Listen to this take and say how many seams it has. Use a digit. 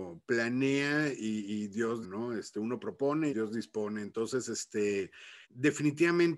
3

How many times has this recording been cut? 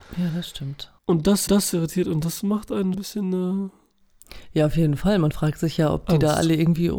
3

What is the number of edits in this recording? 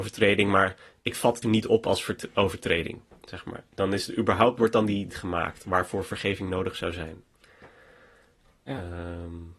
2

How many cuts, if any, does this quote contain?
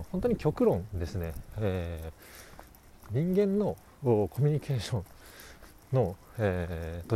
0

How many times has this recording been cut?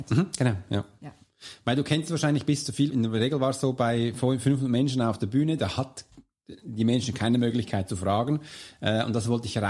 1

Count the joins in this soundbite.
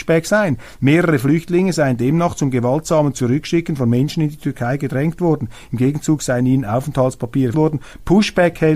1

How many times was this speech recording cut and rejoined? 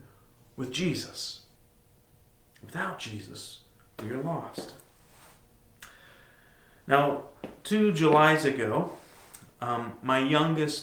0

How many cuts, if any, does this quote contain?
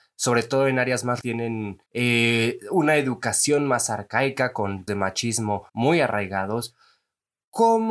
4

